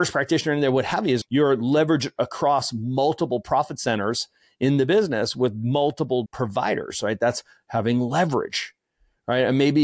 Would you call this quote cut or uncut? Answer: cut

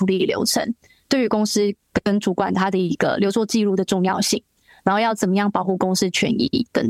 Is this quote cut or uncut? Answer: uncut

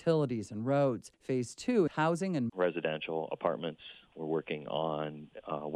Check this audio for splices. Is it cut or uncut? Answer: cut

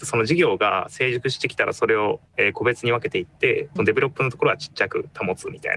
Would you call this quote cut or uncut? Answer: cut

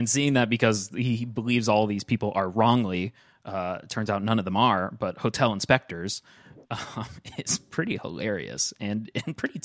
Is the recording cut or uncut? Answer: uncut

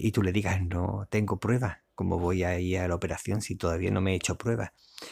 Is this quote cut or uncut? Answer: uncut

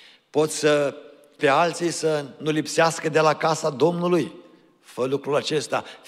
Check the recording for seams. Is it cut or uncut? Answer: cut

